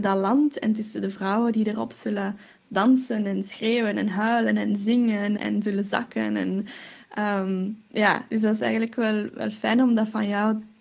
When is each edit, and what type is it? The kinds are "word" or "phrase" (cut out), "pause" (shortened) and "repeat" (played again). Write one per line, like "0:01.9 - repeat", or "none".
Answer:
0:05.4 - word